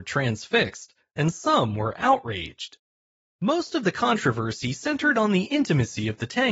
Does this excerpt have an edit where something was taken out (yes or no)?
no